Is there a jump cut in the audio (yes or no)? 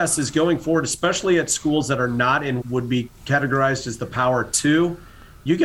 yes